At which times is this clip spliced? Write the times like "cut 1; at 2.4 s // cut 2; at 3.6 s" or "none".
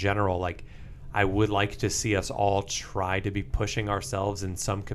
none

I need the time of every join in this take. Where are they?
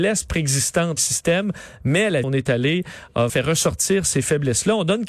cut 1; at 1.0 s // cut 2; at 2.2 s // cut 3; at 3.3 s

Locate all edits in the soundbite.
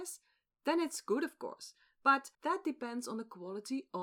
cut 1; at 2.3 s

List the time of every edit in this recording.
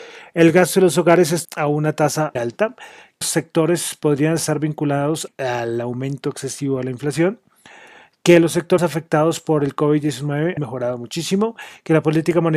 cut 1; at 1.4 s // cut 2; at 2.4 s // cut 3; at 3.2 s // cut 4; at 5.3 s // cut 5; at 8.8 s // cut 6; at 10.6 s

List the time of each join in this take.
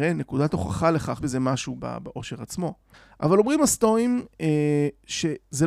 cut 1; at 1.2 s // cut 2; at 1.8 s // cut 3; at 2.9 s

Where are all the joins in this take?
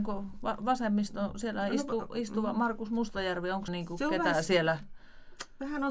cut 1; at 3.7 s

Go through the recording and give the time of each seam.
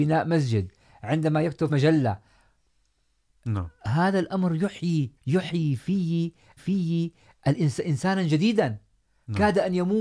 cut 1; at 1.7 s // cut 2; at 5.2 s // cut 3; at 6.6 s

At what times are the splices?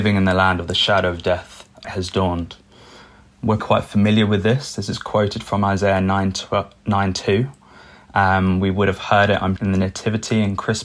cut 1; at 1.8 s // cut 2; at 3.6 s // cut 3; at 9.6 s

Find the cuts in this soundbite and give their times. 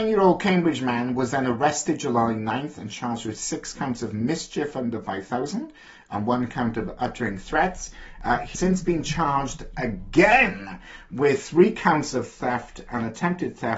cut 1; at 8.6 s

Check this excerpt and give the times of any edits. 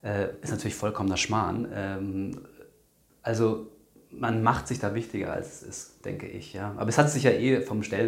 none

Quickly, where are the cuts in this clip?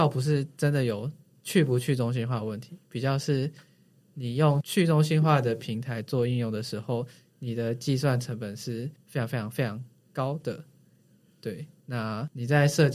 none

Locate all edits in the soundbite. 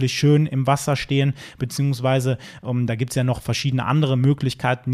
none

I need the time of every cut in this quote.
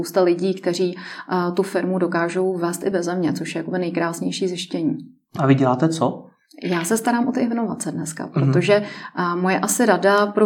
none

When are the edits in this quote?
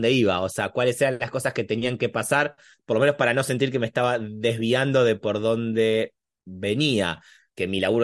none

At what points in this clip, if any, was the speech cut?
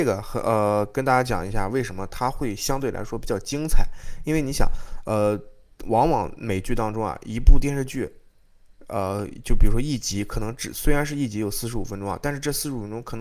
none

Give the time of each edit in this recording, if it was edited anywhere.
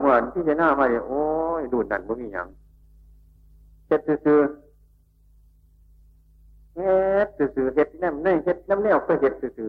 none

